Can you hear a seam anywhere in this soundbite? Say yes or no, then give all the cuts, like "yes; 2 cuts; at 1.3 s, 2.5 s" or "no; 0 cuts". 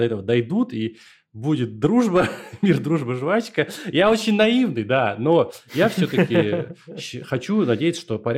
no; 0 cuts